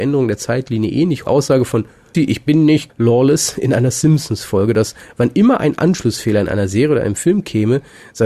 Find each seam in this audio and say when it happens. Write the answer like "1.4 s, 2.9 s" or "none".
1.3 s, 2.1 s, 2.9 s